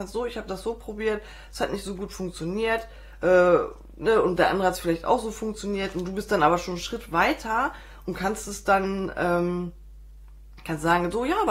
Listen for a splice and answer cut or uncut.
uncut